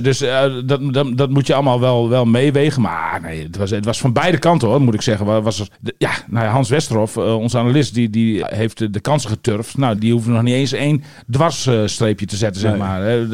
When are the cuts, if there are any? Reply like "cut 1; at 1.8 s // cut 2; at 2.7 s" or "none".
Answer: cut 1; at 5.7 s // cut 2; at 8.4 s // cut 3; at 10.0 s